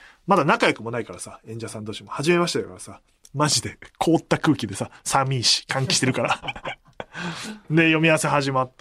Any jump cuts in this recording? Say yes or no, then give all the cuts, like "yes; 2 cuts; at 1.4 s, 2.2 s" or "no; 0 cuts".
no; 0 cuts